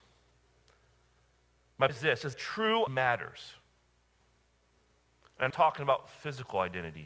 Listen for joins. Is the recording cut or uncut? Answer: cut